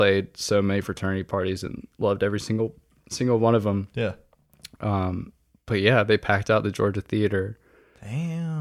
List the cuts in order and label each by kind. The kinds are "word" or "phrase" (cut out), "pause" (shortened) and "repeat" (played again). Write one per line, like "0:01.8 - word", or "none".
none